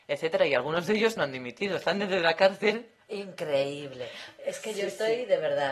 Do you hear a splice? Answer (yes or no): yes